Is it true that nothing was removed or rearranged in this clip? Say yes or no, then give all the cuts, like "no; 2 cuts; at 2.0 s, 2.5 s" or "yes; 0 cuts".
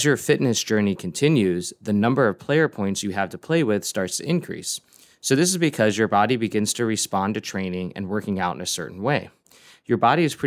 yes; 0 cuts